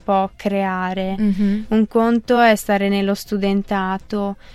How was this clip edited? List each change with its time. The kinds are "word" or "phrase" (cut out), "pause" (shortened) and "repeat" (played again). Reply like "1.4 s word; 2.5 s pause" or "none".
none